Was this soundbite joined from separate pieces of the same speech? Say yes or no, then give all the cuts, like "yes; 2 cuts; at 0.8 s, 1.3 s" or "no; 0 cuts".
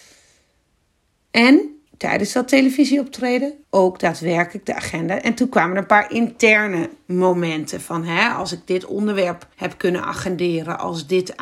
yes; 3 cuts; at 1.9 s, 3.6 s, 9.5 s